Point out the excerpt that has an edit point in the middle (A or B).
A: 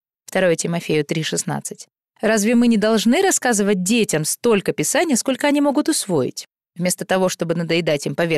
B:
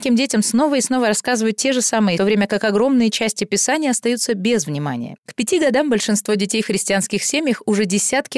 B